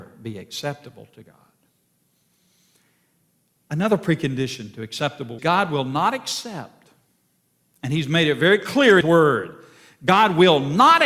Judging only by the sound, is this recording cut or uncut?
cut